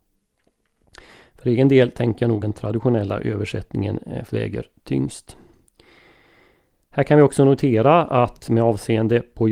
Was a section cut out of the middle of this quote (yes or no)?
yes